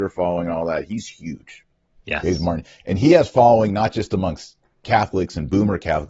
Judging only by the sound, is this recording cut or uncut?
uncut